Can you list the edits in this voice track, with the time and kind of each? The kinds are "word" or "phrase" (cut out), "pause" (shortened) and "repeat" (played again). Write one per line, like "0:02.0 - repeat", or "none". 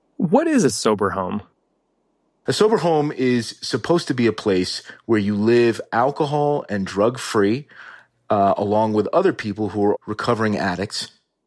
0:10.0 - word